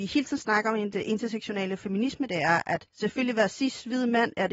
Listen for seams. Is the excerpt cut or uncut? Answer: cut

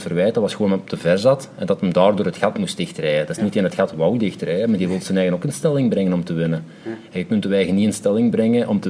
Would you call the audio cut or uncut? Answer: uncut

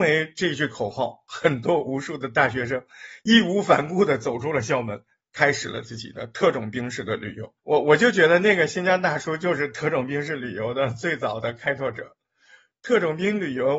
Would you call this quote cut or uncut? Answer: cut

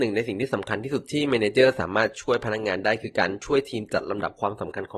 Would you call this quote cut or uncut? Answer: uncut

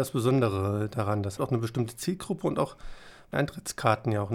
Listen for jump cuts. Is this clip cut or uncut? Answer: cut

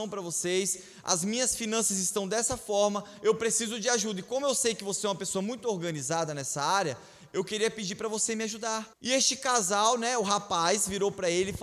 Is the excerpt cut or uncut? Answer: cut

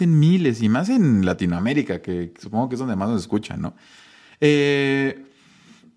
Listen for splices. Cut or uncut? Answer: uncut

